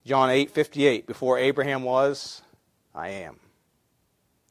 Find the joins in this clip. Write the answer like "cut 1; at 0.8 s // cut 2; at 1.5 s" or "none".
none